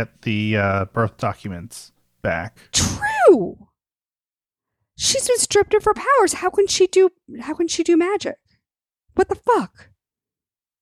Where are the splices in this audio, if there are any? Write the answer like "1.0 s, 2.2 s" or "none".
none